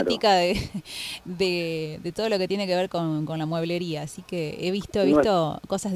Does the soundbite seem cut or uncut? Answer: uncut